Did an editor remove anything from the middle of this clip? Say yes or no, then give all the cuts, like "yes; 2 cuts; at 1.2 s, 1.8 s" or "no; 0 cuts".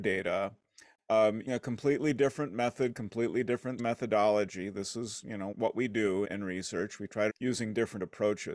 yes; 5 cuts; at 1.5 s, 3.8 s, 5.5 s, 6.2 s, 7.3 s